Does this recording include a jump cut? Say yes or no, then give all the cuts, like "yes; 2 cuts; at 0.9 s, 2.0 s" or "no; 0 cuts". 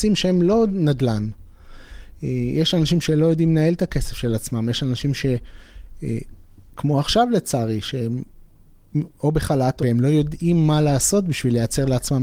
yes; 1 cut; at 9.8 s